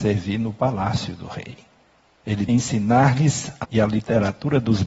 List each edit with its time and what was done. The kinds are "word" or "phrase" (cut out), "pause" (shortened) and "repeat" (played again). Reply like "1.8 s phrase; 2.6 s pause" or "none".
2.5 s word; 3.6 s word